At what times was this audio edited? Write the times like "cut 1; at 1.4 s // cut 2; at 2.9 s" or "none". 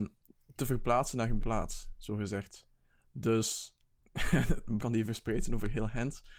cut 1; at 1.4 s // cut 2; at 4.8 s